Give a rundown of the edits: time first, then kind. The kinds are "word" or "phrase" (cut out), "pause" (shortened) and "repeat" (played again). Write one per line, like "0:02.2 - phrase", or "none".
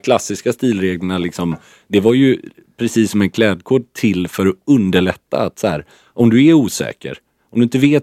none